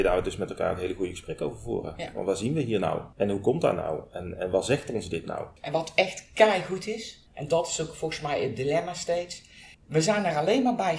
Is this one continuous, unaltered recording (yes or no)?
no